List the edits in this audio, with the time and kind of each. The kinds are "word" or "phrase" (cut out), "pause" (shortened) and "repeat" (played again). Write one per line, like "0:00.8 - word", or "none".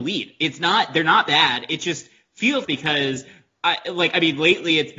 0:02.6 - phrase